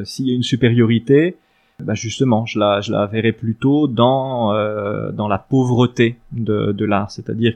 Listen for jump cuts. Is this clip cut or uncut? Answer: uncut